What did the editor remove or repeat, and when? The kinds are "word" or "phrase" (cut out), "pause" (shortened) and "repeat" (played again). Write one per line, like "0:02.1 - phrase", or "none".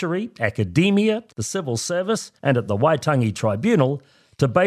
0:01.3 - pause
0:02.4 - pause